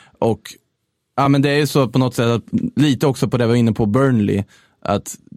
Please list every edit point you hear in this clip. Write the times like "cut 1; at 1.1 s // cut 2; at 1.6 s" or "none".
none